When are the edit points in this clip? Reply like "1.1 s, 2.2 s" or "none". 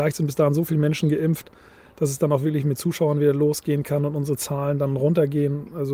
none